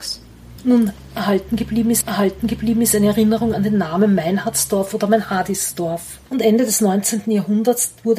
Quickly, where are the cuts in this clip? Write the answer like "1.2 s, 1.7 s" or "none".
2.0 s